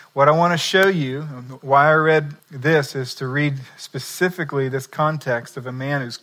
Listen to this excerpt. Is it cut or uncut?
cut